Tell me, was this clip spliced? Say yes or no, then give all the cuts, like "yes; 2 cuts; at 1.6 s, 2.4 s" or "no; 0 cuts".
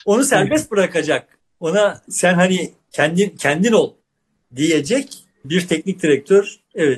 no; 0 cuts